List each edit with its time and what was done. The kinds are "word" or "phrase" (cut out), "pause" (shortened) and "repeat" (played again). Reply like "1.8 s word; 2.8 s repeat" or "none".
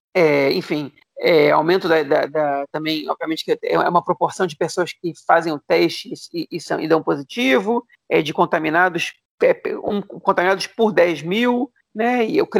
none